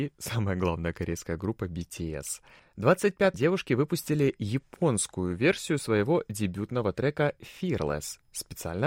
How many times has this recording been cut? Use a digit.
1